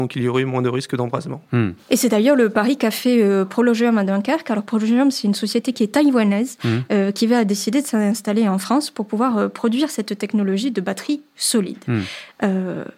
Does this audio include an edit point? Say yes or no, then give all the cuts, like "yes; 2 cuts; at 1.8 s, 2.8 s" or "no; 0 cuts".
no; 0 cuts